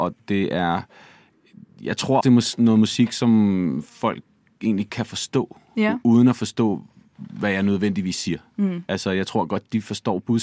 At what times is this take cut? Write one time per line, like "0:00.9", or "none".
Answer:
0:02.2
0:04.9